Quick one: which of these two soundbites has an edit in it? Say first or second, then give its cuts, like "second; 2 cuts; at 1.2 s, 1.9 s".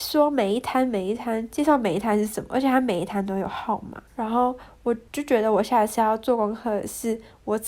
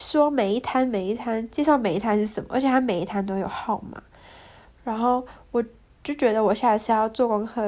first; 2 cuts; at 4.1 s, 5.1 s